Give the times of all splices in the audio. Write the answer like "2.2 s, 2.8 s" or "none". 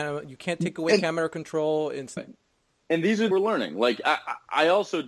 2.2 s, 3.3 s